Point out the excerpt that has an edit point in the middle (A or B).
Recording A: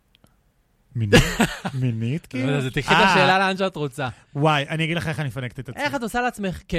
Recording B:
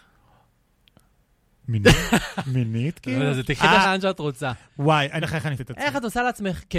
B